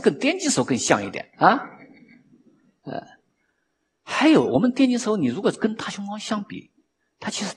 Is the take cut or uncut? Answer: cut